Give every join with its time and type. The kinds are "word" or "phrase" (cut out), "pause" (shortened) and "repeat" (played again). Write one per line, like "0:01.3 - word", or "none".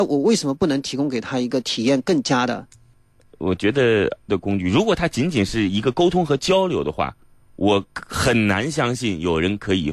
0:04.3 - word